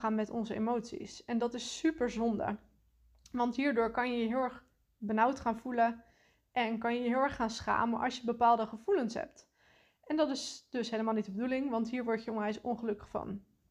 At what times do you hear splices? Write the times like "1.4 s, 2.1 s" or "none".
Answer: none